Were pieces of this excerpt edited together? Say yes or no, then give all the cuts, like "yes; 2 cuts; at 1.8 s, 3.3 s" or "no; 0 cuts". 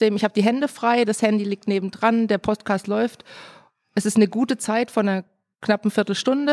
no; 0 cuts